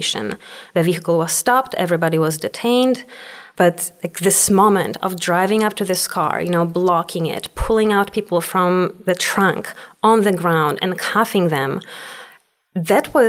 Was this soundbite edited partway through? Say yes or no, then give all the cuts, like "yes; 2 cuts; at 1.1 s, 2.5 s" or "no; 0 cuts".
no; 0 cuts